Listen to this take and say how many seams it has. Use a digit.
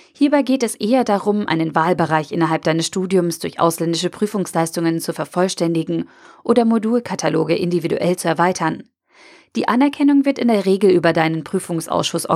0